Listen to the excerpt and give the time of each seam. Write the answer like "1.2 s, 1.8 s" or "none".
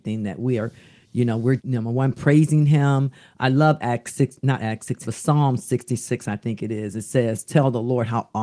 1.6 s, 5.0 s

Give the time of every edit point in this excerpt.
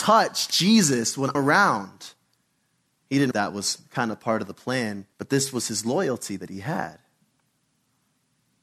1.3 s, 3.3 s, 5.1 s

